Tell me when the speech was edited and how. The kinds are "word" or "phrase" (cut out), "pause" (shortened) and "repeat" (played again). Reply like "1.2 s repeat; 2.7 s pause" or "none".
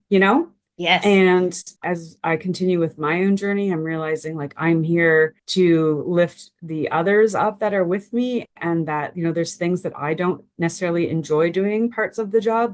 1.8 s pause; 5.4 s pause; 8.5 s pause